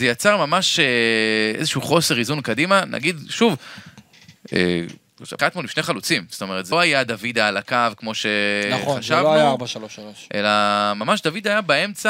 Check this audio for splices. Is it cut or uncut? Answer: cut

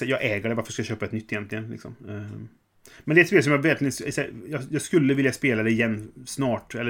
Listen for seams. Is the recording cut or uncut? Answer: uncut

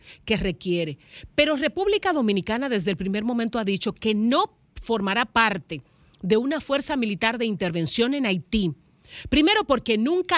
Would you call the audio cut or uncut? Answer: uncut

